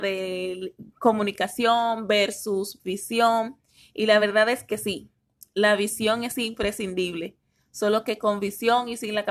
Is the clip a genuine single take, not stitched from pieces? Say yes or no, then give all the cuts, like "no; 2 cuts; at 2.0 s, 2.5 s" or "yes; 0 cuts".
yes; 0 cuts